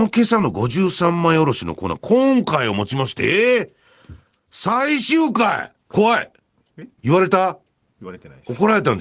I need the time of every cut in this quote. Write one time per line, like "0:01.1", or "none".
0:05.8

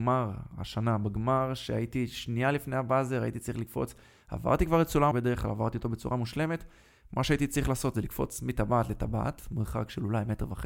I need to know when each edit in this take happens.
0:05.1

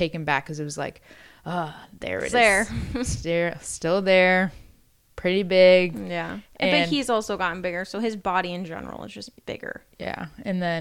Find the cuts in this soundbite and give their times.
0:02.3

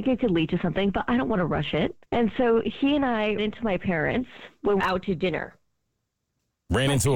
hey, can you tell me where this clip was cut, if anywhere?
0:02.0
0:03.4
0:04.8

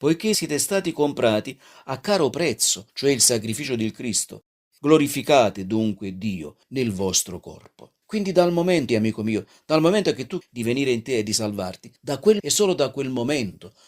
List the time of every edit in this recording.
0:02.9
0:04.8
0:06.6
0:08.0
0:08.9
0:10.4
0:12.0
0:12.4

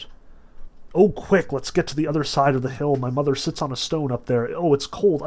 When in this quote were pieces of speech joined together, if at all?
none

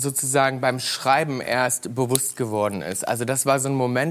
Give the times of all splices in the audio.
none

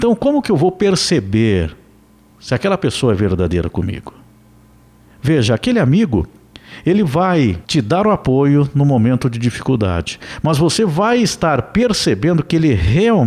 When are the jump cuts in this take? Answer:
0:07.6

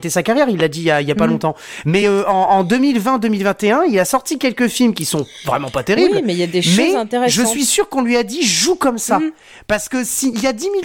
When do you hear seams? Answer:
none

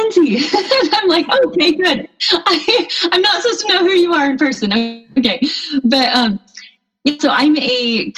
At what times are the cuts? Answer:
none

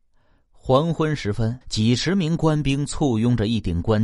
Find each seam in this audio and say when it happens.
0:01.6

